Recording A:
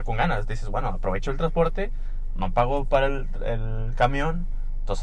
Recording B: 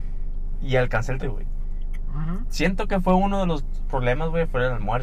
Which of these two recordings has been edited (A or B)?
B